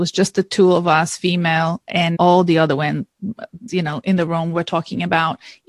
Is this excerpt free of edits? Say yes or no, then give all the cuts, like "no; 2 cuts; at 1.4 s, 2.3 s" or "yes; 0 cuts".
no; 2 cuts; at 2.1 s, 3.7 s